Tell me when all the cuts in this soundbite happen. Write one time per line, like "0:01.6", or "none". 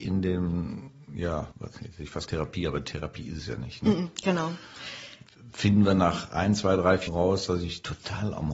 0:01.5
0:02.3
0:07.1